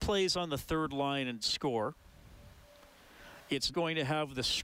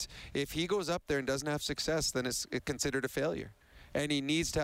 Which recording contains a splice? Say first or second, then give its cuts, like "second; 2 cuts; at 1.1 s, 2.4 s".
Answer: first; 2 cuts; at 1.4 s, 3.7 s